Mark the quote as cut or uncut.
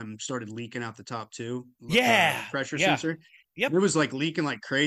uncut